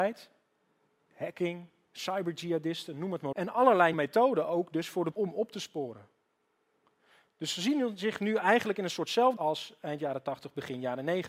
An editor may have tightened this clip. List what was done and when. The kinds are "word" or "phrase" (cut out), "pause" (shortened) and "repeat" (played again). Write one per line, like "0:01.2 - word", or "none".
0:03.3 - word
0:03.9 - word
0:05.1 - word
0:09.4 - word